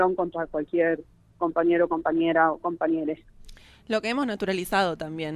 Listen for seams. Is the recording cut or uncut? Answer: uncut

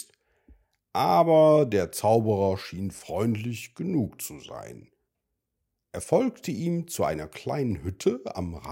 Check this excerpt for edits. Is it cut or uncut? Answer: uncut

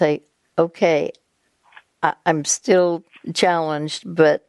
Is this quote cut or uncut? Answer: uncut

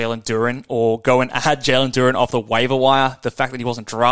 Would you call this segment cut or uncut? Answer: uncut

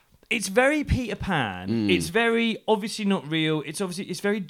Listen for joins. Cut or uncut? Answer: uncut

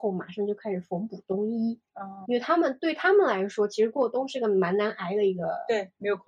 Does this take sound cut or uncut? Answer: cut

